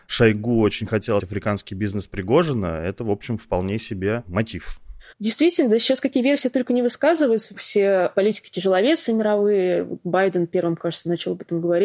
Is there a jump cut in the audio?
yes; 2 cuts; at 1.2 s, 5.1 s

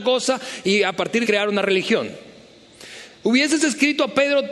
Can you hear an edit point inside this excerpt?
yes; 1 cut; at 1.2 s

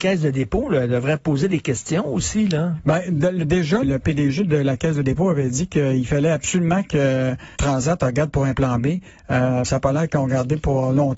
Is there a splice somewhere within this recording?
yes; 3 cuts; at 3.8 s, 7.6 s, 9.6 s

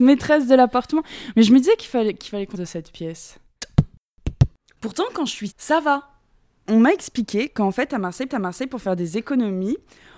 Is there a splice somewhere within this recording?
yes; 3 cuts; at 2.5 s, 5.5 s, 8.3 s

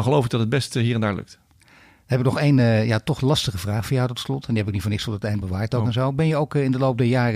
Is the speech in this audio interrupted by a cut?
no; 0 cuts

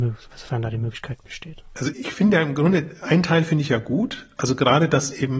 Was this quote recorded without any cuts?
no; 1 cut; at 1.9 s

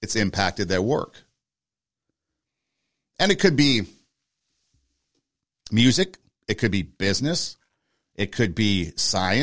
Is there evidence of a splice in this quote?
no; 0 cuts

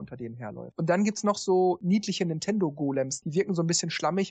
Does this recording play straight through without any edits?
yes; 0 cuts

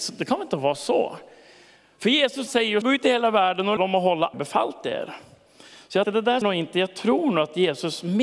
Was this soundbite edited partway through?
yes; 6 cuts; at 2.5 s, 2.8 s, 3.8 s, 4.3 s, 6.0 s, 6.4 s

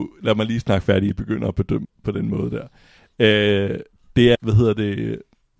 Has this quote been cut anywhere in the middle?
yes; 3 cuts; at 1.1 s, 1.8 s, 4.3 s

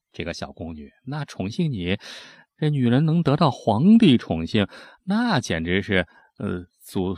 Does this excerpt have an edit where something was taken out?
no; 0 cuts

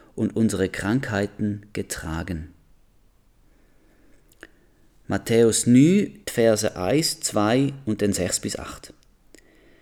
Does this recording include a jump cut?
yes; 1 cut; at 6.2 s

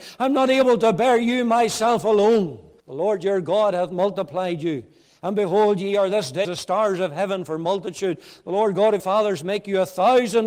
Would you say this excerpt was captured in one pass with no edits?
no; 3 cuts; at 2.8 s, 6.4 s, 9.0 s

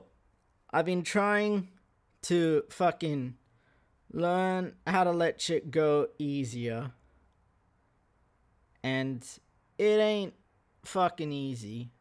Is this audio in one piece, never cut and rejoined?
yes; 0 cuts

